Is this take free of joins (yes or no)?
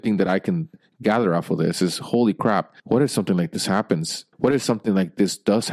no